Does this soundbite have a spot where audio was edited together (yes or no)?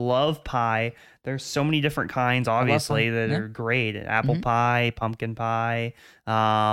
no